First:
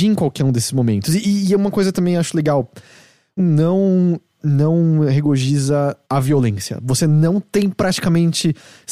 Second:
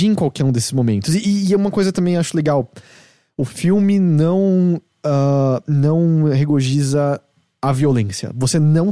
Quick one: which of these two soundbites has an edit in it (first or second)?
first